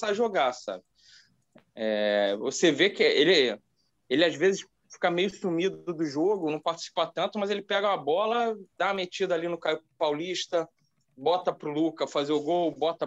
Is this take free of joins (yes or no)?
yes